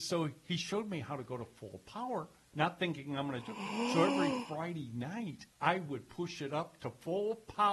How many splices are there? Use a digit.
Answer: 1